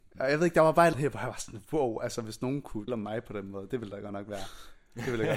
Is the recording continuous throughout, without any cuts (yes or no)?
no